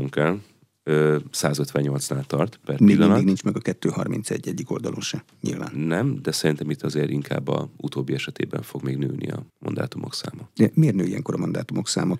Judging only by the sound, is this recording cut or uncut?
cut